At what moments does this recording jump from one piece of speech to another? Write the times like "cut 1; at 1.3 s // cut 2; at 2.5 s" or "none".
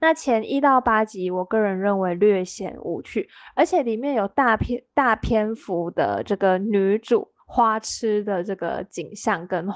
cut 1; at 7.4 s